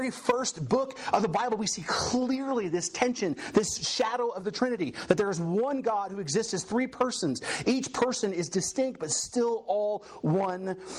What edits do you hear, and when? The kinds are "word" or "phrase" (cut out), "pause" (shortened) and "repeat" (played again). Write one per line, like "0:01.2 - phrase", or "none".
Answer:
none